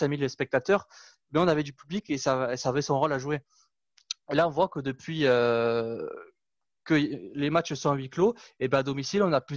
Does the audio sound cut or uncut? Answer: uncut